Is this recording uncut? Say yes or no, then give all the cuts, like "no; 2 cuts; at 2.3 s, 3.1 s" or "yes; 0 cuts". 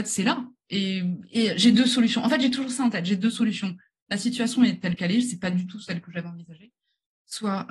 yes; 0 cuts